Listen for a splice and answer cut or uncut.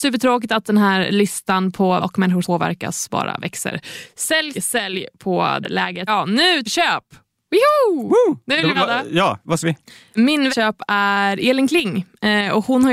cut